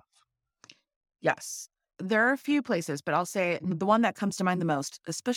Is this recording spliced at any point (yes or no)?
no